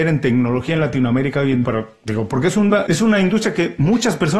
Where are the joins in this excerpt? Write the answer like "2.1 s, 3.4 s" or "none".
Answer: 1.6 s, 2.9 s